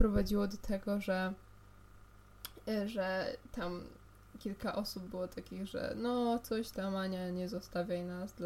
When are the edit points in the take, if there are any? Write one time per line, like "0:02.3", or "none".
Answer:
none